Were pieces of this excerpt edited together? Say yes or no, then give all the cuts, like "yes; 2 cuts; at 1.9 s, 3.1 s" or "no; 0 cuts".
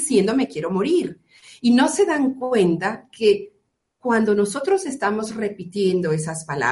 no; 0 cuts